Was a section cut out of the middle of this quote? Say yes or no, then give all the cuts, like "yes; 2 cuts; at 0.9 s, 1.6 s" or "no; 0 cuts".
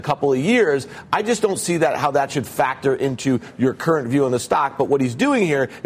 no; 0 cuts